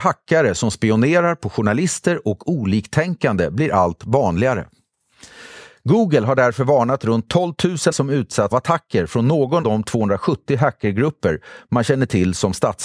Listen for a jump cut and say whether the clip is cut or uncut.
cut